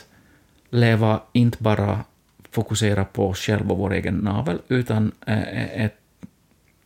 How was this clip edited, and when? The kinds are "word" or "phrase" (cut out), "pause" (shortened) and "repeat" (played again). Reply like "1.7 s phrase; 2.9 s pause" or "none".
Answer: none